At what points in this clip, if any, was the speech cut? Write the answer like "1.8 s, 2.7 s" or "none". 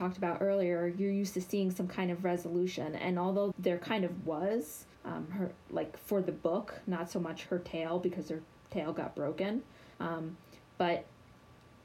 3.5 s, 4.9 s, 7.5 s, 8.6 s, 9.9 s